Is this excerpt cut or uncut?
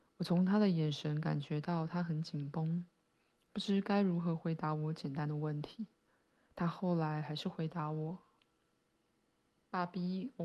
uncut